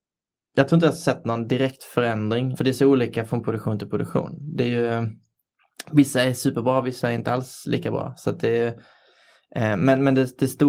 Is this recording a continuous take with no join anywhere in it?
no; 1 cut; at 2.5 s

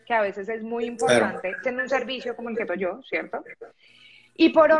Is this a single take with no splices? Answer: no; 2 cuts; at 1.6 s, 2.7 s

